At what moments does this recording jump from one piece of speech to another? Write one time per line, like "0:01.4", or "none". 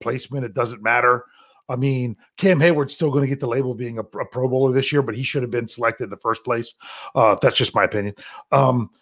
none